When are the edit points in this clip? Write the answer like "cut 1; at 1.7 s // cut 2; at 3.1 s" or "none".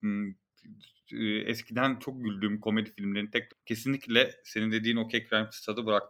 cut 1; at 3.5 s